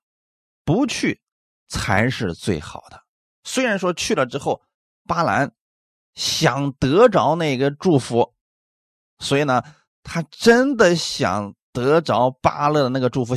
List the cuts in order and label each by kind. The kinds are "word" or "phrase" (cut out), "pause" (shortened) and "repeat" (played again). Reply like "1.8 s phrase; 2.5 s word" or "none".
none